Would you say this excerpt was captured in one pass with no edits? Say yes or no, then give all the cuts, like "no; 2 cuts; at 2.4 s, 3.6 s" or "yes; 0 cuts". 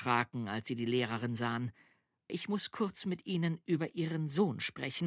yes; 0 cuts